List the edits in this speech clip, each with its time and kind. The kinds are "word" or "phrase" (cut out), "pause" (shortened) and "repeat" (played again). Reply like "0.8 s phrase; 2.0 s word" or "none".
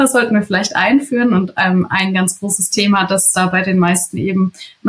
none